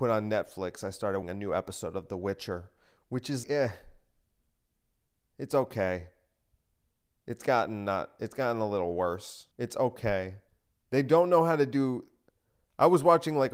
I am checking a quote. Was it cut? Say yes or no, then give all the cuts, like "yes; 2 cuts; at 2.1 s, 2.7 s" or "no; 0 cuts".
yes; 4 cuts; at 1.2 s, 3.4 s, 9.5 s, 10.5 s